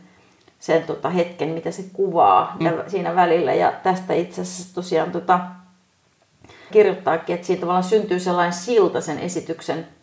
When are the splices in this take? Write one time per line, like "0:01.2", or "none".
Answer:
0:02.6
0:06.7